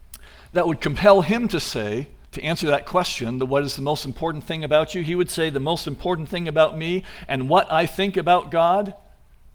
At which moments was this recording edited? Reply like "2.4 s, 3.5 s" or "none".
2.3 s